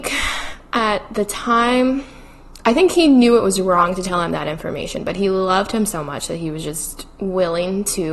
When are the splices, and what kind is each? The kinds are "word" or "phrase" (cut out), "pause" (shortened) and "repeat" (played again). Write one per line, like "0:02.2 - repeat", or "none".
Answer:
none